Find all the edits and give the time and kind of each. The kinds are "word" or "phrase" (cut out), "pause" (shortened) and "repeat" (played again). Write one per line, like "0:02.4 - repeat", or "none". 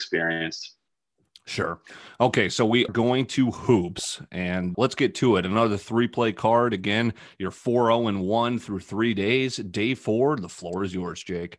0:02.9 - word
0:04.7 - word